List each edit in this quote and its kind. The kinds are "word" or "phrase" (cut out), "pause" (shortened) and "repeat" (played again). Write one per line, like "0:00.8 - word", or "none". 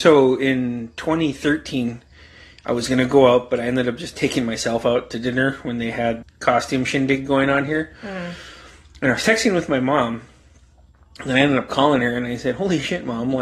0:06.2 - word

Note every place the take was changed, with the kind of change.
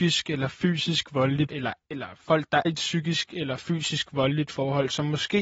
0:01.5 - word
0:01.8 - pause
0:02.6 - word

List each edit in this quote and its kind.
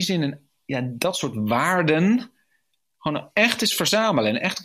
none

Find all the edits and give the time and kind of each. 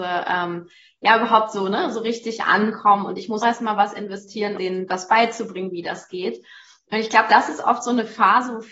0:03.4 - word
0:04.6 - word

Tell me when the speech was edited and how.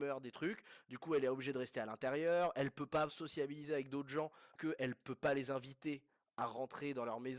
0:03.1 - word
0:04.6 - word

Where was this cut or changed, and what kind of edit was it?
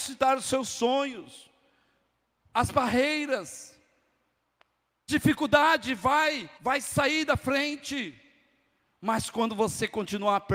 0:02.4 - phrase
0:05.1 - word
0:06.6 - pause

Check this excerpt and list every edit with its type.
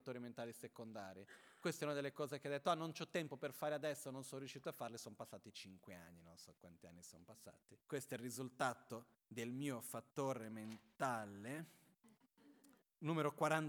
0:07.8 - pause
0:12.8 - pause

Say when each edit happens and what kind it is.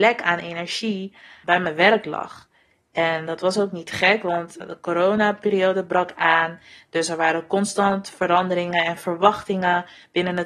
none

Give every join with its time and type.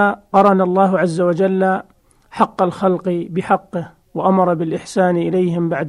none

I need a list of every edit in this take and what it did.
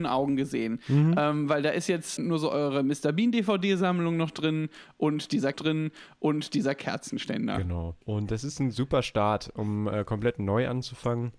0:02.2 - word
0:05.5 - repeat
0:08.0 - pause

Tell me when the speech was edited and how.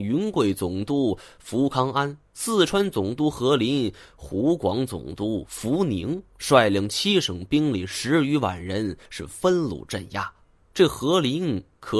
0:09.1 - pause
0:10.6 - pause

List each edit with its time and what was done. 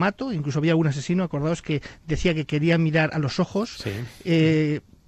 none

